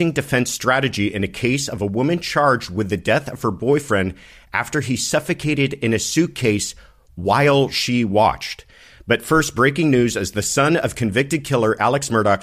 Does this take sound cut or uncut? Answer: uncut